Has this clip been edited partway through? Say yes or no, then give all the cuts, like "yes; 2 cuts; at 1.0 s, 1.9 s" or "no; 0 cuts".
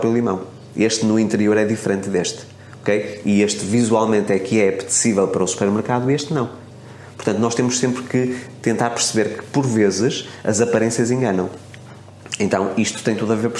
no; 0 cuts